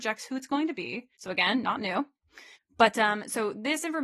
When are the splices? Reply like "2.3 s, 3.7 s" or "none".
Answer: 1.1 s, 2.5 s